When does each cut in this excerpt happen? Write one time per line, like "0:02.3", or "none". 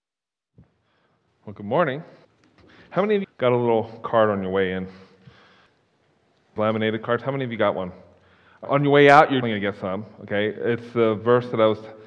0:02.2
0:03.2
0:06.6
0:08.6
0:09.4